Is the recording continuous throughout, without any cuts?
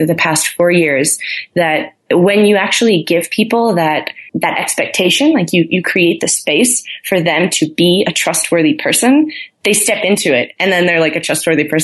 no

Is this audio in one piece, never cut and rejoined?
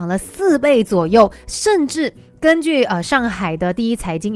yes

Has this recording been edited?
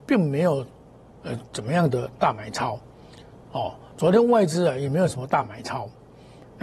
no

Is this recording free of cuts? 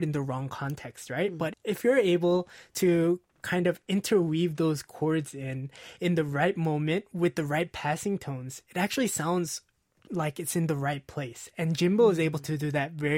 yes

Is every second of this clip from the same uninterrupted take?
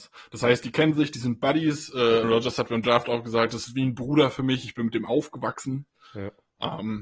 no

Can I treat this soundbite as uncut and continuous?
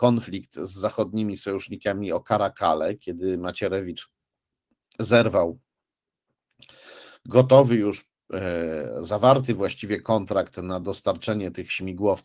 yes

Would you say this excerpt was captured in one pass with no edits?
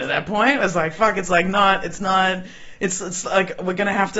yes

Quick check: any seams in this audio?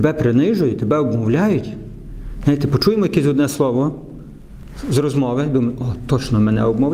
no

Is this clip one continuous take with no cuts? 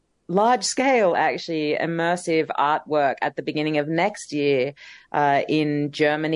yes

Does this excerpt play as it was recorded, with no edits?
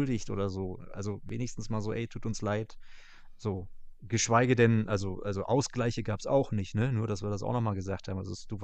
yes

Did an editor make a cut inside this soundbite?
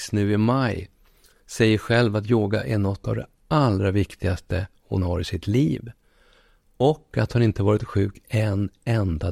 no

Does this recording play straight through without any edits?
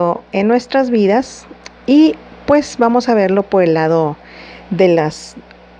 yes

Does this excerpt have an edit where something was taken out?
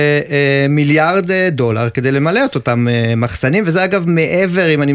no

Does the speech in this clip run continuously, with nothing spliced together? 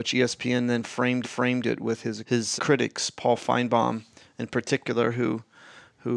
no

